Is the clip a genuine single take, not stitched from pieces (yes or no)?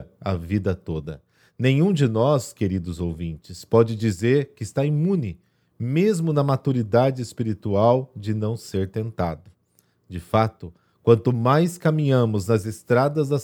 yes